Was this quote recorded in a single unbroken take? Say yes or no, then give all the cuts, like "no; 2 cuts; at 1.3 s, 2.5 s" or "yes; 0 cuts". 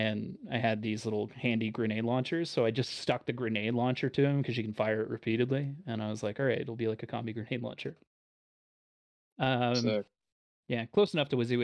yes; 0 cuts